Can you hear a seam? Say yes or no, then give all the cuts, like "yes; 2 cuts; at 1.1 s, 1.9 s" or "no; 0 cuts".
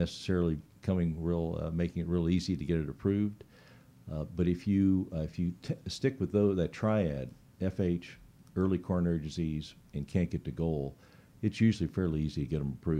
no; 0 cuts